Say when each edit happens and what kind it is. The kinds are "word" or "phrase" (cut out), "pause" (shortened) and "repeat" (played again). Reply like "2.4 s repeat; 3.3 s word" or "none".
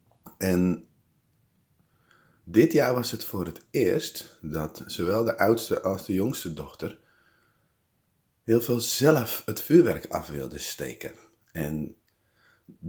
none